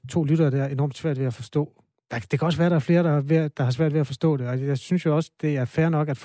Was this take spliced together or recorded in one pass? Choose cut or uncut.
uncut